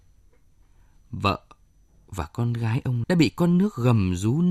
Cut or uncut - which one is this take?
cut